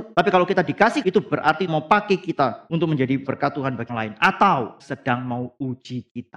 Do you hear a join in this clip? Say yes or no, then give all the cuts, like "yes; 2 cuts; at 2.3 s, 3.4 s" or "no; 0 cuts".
yes; 5 cuts; at 1.0 s, 1.7 s, 3.3 s, 3.9 s, 4.8 s